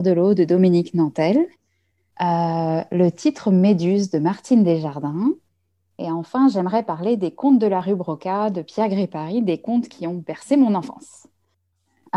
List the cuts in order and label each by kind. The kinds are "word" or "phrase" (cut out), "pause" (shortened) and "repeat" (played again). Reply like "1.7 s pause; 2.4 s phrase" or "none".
none